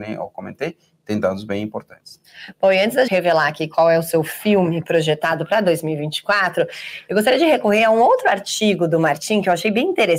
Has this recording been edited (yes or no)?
yes